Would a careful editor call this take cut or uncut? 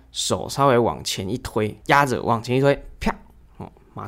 uncut